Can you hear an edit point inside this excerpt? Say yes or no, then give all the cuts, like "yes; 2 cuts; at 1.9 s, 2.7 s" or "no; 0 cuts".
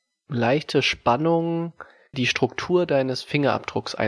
yes; 1 cut; at 2.1 s